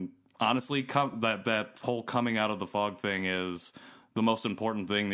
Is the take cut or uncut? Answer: uncut